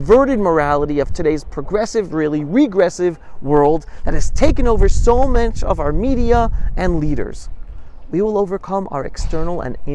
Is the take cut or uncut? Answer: uncut